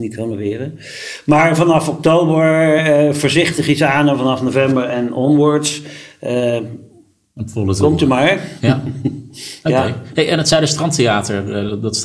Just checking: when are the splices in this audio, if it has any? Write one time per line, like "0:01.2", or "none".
none